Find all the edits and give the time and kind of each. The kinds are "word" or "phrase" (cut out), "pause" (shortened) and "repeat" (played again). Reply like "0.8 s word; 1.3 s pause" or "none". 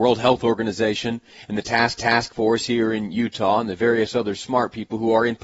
2.0 s repeat